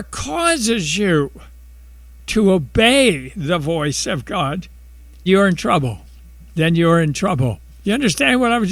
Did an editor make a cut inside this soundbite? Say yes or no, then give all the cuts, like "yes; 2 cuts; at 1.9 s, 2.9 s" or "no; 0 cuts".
yes; 1 cut; at 5.3 s